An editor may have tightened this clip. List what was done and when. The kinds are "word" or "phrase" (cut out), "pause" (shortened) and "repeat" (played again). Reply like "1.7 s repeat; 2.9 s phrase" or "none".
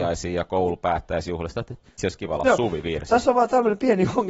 2.0 s word; 2.4 s word